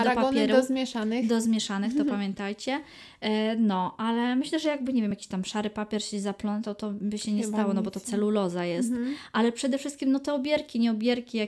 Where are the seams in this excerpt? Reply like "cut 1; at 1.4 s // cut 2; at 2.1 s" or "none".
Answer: none